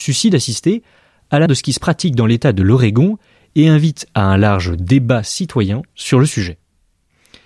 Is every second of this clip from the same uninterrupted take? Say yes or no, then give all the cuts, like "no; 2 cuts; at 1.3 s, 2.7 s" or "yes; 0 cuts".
no; 1 cut; at 1.5 s